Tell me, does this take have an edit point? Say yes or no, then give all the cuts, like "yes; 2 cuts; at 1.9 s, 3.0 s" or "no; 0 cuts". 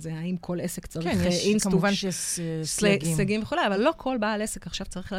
no; 0 cuts